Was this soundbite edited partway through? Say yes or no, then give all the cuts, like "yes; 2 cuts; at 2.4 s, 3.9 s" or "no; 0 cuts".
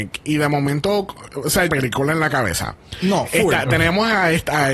yes; 1 cut; at 1.7 s